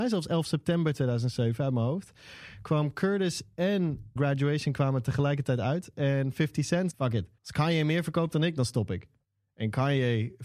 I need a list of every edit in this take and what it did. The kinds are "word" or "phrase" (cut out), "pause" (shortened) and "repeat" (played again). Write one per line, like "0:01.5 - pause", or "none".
0:04.2 - word
0:06.9 - phrase
0:07.4 - pause